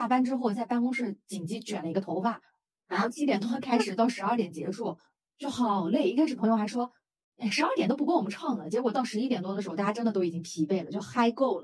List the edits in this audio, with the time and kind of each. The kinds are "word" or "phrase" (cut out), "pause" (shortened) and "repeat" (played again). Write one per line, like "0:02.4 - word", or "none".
none